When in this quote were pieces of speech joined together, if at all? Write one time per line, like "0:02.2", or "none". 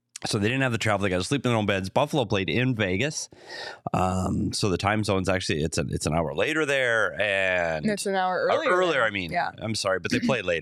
none